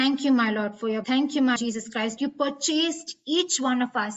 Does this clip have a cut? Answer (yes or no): yes